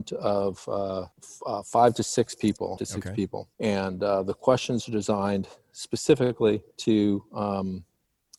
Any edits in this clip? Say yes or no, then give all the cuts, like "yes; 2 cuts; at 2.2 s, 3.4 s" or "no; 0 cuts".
yes; 4 cuts; at 1.1 s, 2.8 s, 3.5 s, 6.7 s